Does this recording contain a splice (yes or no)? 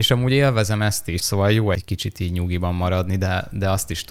yes